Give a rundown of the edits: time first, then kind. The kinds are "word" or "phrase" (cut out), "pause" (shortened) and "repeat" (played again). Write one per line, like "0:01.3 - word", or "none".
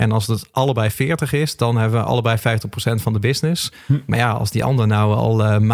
none